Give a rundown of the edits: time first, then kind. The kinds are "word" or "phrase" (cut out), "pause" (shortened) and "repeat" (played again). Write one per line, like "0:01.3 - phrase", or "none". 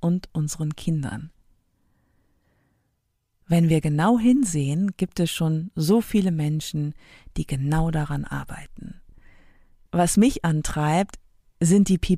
none